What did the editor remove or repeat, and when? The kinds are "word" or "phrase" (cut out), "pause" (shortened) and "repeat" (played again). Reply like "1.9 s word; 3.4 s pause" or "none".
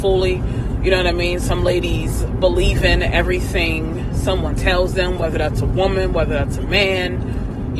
none

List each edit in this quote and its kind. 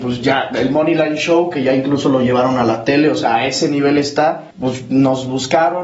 4.5 s pause

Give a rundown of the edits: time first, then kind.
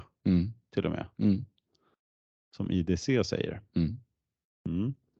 none

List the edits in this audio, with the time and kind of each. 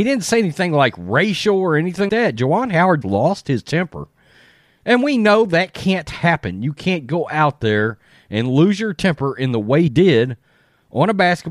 2.1 s word; 3.0 s word; 9.9 s word

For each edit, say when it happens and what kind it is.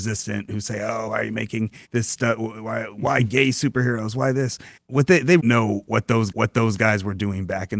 1.1 s word; 1.9 s pause; 4.8 s word; 5.4 s phrase; 6.3 s repeat

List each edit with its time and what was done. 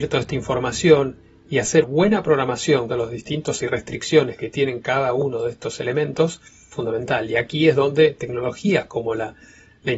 1.8 s word; 2.9 s word; 3.6 s word; 6.7 s word

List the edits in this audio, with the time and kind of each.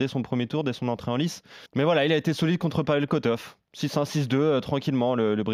1.7 s pause

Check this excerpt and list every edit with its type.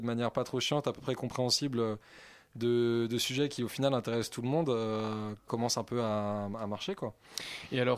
5.5 s word

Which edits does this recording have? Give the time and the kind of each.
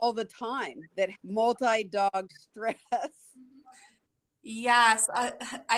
1.1 s word

